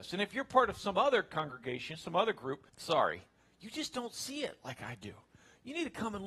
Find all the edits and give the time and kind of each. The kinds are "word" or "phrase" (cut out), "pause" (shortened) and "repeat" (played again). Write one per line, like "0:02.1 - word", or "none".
0:02.7 - pause